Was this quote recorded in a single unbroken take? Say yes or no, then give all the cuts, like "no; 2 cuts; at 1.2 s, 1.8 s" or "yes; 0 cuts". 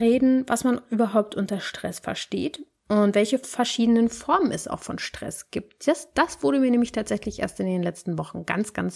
yes; 0 cuts